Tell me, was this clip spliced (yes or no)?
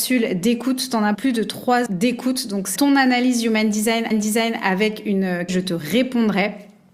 yes